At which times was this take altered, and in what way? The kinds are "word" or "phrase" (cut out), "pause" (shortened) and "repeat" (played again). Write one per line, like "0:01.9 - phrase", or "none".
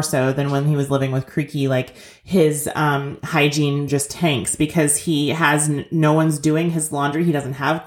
none

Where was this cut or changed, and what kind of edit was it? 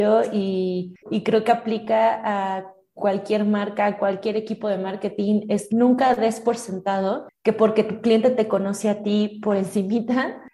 0:01.0 - pause
0:05.7 - word

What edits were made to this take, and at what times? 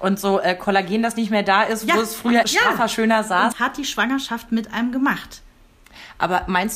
0:02.4 - word
0:03.5 - word

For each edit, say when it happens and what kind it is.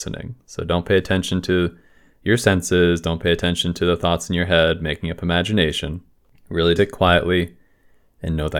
0:06.8 - word

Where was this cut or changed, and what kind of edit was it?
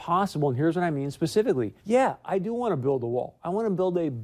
0:01.8 - pause

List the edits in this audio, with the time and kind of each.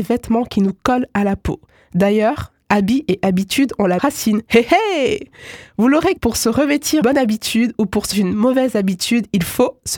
0:04.0 - word
0:06.2 - word
0:07.0 - word
0:08.1 - word

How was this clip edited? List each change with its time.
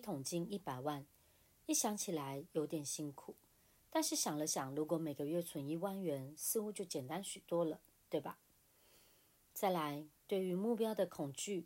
none

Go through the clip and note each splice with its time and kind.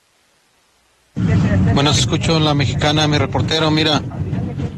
0:02.0 - phrase

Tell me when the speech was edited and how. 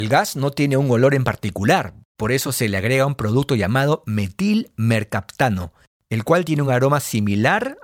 none

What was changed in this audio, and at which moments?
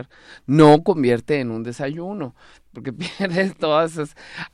none

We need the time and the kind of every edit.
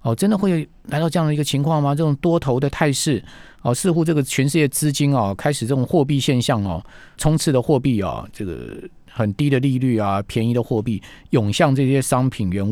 0:07.2 - word

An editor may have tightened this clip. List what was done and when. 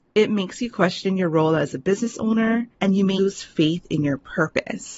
0:02.7 - pause
0:03.2 - word

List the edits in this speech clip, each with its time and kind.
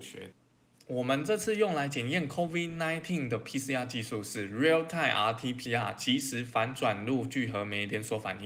0:05.7 - word

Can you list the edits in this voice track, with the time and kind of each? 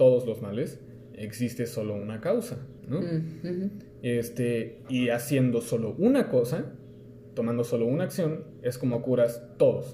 0:02.8 - pause

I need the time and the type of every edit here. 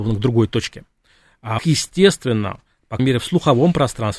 0:01.6 - word
0:03.0 - word

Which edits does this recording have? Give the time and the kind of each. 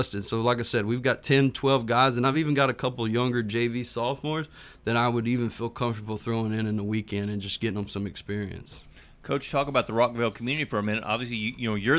none

